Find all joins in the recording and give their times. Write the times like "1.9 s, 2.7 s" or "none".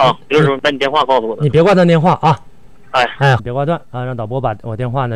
3.4 s